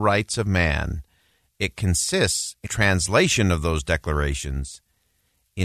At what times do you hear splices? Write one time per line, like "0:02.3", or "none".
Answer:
0:02.7